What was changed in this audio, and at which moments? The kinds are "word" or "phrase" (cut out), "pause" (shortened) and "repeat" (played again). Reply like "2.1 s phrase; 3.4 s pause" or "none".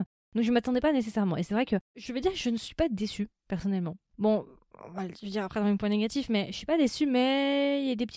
none